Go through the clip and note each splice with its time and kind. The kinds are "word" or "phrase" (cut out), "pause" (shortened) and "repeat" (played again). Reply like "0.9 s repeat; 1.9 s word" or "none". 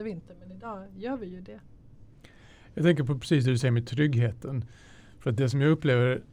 none